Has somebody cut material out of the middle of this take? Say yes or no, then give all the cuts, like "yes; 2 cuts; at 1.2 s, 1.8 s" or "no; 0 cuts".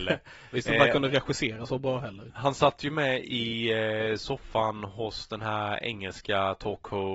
yes; 1 cut; at 2.3 s